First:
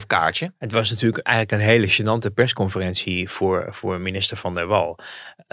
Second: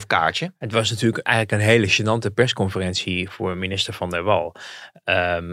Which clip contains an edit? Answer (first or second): second